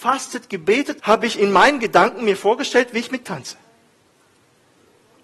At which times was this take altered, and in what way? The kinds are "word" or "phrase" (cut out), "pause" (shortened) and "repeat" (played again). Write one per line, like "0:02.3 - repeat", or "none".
0:01.0 - word
0:03.2 - word